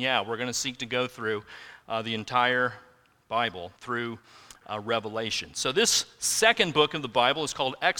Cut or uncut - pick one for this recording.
cut